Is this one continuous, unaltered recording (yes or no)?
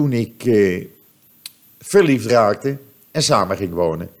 yes